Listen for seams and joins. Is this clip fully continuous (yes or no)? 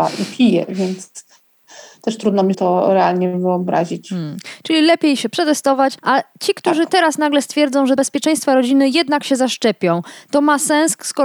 no